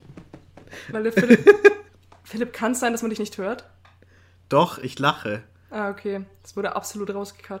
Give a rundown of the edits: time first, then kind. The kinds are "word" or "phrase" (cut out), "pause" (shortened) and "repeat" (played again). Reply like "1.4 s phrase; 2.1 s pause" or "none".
none